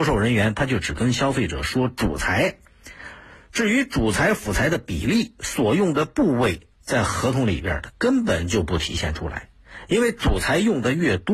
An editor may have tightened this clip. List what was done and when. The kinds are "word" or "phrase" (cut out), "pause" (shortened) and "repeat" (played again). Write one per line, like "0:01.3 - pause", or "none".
0:06.7 - pause